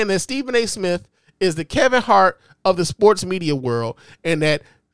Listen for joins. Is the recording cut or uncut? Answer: uncut